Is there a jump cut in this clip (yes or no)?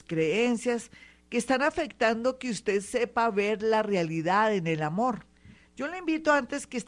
no